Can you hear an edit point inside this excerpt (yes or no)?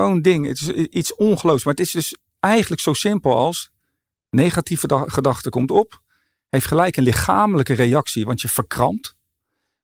no